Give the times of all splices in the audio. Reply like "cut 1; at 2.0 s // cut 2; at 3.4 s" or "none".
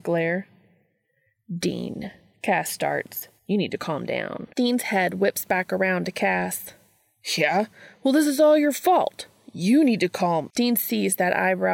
cut 1; at 3.4 s // cut 2; at 4.5 s